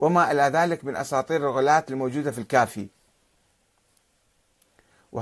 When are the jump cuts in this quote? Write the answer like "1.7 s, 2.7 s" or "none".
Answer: none